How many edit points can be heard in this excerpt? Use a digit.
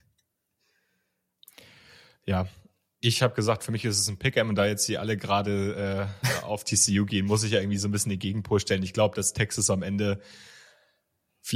0